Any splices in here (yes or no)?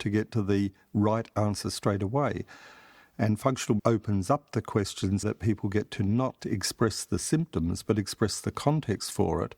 yes